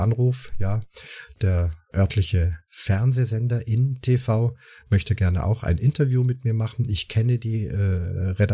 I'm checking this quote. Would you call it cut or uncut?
uncut